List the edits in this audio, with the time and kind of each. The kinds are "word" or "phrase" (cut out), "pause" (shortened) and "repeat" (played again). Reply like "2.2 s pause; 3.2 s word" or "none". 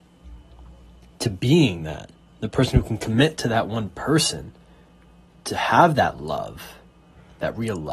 none

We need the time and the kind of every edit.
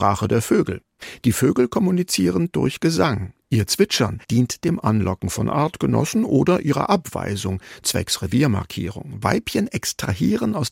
4.2 s pause

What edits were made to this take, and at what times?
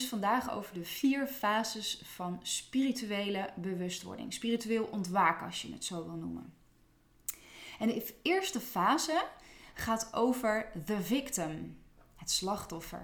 none

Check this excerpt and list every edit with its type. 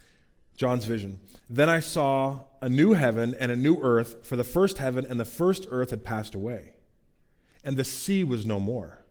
none

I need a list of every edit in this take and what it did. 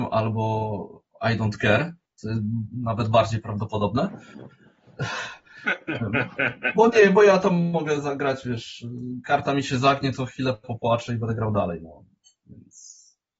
none

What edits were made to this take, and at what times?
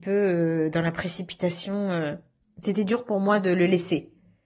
none

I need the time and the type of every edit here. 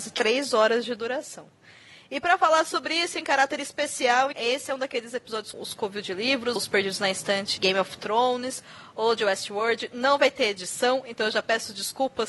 4.3 s word; 5.5 s word; 6.6 s word; 7.6 s word

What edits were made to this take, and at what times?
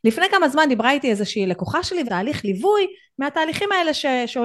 2.1 s phrase

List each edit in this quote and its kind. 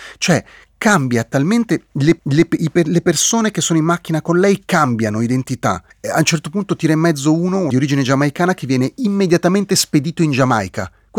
2.2 s repeat; 5.9 s pause; 7.7 s phrase

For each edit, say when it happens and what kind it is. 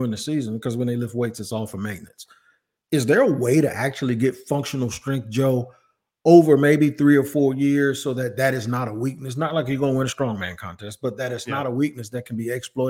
none

